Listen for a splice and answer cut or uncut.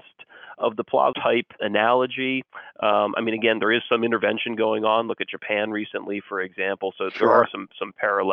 cut